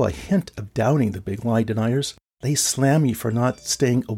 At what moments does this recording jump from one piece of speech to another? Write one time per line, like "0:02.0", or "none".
0:02.2